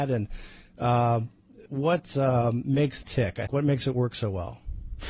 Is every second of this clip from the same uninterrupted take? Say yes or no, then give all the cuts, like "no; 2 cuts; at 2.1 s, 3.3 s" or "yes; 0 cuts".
no; 3 cuts; at 1.7 s, 3.0 s, 3.5 s